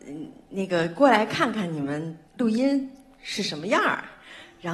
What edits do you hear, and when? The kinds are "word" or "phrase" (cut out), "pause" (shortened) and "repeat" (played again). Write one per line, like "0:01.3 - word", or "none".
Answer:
0:02.3 - pause